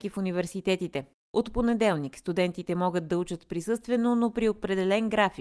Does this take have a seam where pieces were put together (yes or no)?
no